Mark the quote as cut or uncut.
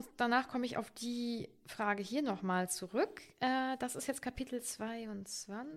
uncut